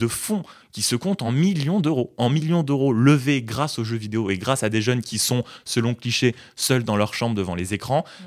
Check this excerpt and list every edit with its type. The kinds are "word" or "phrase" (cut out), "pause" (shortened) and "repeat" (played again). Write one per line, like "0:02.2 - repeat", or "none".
none